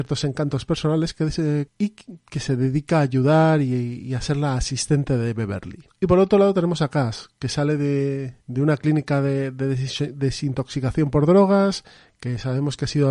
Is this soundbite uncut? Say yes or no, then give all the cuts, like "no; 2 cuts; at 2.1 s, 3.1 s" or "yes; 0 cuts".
no; 3 cuts; at 1.7 s, 5.9 s, 8.4 s